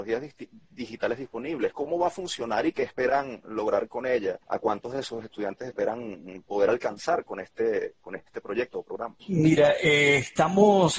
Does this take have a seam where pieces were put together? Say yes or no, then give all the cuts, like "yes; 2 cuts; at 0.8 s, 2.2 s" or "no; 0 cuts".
yes; 1 cut; at 4.4 s